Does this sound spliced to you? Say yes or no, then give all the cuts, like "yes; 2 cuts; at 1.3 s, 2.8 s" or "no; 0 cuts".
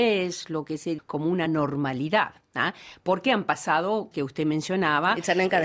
yes; 3 cuts; at 1.0 s, 1.5 s, 4.1 s